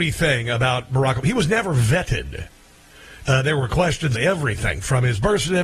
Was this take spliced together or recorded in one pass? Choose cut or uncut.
cut